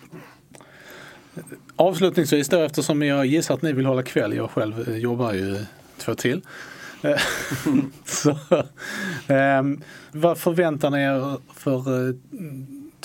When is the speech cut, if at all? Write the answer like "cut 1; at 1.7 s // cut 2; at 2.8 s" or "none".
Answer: cut 1; at 6.2 s // cut 2; at 10.1 s